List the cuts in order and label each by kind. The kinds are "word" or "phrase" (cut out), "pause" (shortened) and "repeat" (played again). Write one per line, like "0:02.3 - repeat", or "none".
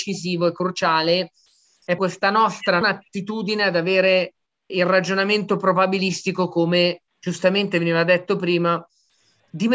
0:02.0 - word
0:02.8 - word
0:04.7 - word
0:07.1 - pause